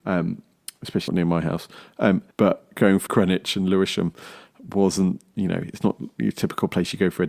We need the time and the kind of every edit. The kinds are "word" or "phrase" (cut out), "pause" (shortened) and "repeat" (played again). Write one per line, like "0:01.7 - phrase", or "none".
0:01.1 - word
0:02.3 - pause
0:03.1 - phrase